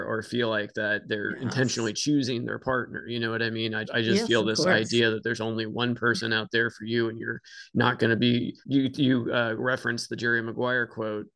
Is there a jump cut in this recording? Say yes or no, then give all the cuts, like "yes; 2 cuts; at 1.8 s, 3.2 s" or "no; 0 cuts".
yes; 2 cuts; at 3.9 s, 8.6 s